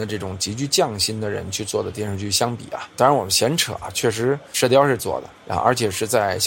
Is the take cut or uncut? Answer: cut